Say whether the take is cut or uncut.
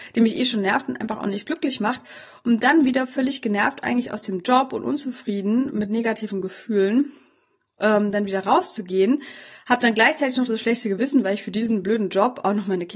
uncut